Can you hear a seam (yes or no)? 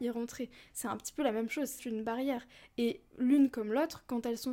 yes